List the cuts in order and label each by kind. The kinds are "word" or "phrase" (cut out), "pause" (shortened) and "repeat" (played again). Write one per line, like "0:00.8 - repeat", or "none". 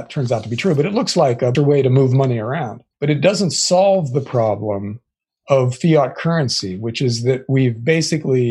0:01.5 - phrase
0:02.9 - pause